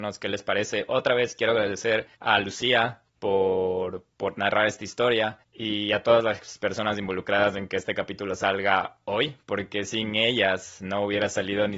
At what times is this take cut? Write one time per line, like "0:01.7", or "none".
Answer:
0:02.1
0:03.1
0:05.4